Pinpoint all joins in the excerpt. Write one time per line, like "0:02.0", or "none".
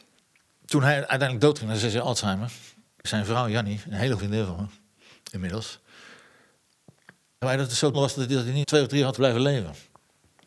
0:03.0
0:04.2
0:07.4
0:07.9
0:08.6
0:09.2